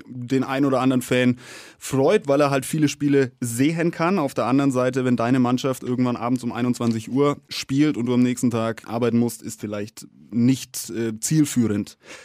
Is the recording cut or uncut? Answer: cut